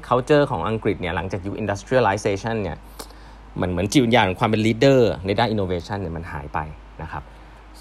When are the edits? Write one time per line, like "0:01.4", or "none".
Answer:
none